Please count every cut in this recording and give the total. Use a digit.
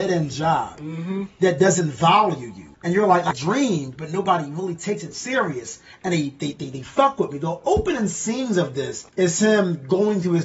4